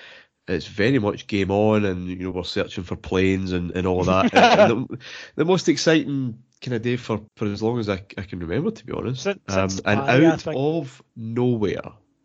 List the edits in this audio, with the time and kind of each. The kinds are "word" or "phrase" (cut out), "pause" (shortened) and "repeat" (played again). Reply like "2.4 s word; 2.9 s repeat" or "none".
2.3 s word; 3.7 s word; 6.8 s word; 7.3 s pause; 11.1 s pause